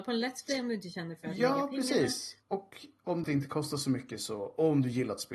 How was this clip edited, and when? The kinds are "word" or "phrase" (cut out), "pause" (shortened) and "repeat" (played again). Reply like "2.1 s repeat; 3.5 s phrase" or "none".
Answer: 2.4 s pause; 3.2 s phrase